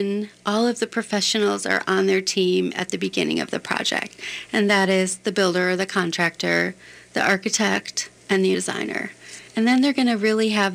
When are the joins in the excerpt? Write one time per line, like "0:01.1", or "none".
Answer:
0:08.2
0:08.5
0:09.5